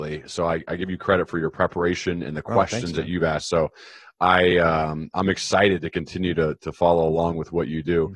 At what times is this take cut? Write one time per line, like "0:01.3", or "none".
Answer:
none